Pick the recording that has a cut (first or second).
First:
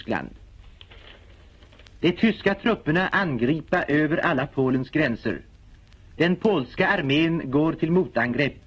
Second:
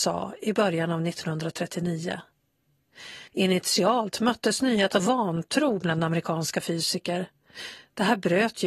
second